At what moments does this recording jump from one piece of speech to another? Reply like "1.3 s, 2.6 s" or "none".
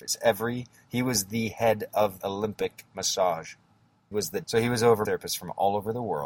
2.2 s, 4.1 s, 4.4 s, 5.0 s